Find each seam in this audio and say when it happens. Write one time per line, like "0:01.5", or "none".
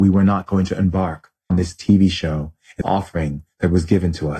0:01.5
0:02.8